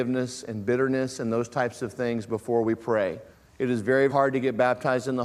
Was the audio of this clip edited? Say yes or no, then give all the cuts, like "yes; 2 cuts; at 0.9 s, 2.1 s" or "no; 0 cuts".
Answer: yes; 2 cuts; at 3.3 s, 4.1 s